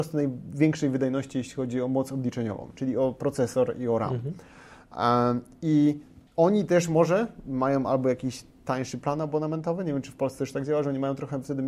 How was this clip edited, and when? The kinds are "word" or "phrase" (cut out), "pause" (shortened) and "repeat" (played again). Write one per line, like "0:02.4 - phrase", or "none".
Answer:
0:06.3 - pause

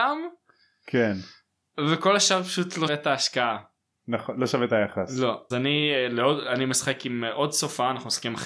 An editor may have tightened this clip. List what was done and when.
0:02.9 - word
0:05.5 - word

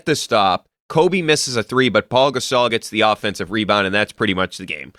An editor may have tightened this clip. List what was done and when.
none

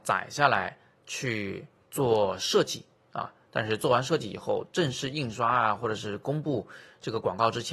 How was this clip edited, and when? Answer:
0:01.8 - pause

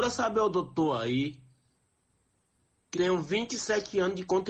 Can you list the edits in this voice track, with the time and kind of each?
0:02.9 - word

